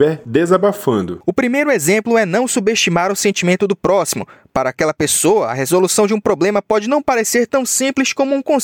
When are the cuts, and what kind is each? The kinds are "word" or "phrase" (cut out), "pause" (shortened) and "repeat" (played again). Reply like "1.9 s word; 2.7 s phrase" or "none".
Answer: none